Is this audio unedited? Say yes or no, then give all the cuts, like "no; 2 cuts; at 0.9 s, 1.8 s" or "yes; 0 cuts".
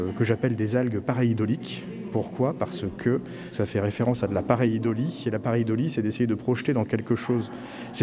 no; 1 cut; at 3.5 s